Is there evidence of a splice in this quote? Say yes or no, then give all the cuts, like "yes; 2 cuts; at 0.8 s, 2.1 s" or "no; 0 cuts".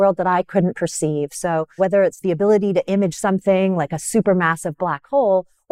yes; 2 cuts; at 1.8 s, 2.2 s